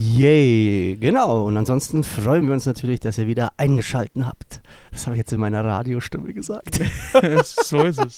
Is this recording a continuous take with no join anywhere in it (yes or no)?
yes